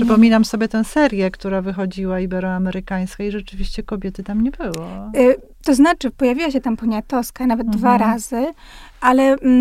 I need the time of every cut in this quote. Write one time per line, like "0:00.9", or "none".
none